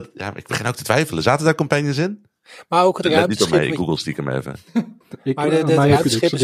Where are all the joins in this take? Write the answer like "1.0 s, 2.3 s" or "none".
5.0 s